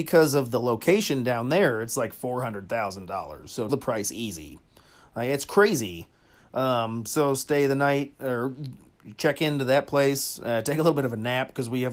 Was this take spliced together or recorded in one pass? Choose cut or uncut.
cut